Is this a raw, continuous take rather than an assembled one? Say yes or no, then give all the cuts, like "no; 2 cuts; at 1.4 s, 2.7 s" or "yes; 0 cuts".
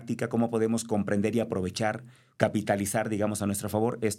yes; 0 cuts